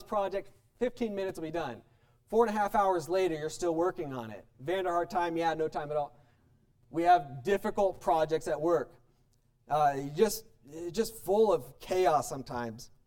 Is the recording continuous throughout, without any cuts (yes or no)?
yes